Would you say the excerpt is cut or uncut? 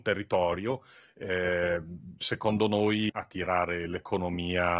cut